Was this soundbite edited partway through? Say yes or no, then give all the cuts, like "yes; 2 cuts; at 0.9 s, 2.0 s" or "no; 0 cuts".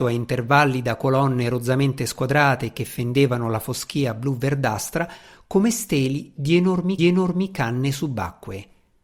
yes; 1 cut; at 7.0 s